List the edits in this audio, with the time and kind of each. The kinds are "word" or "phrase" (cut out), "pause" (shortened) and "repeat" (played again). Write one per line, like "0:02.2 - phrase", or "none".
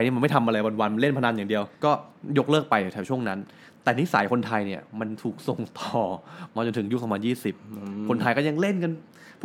0:01.7 - pause